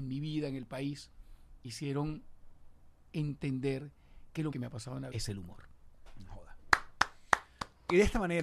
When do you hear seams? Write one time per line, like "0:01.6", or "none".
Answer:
0:01.6
0:04.5
0:05.1